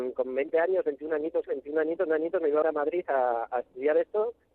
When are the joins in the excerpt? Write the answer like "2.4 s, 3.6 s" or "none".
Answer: 1.5 s, 2.1 s, 2.6 s